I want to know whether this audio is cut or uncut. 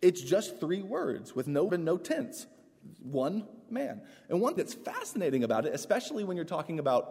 cut